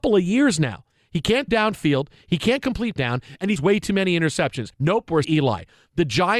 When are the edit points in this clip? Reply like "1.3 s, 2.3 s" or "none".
1.5 s, 3.0 s, 3.6 s, 4.7 s, 5.2 s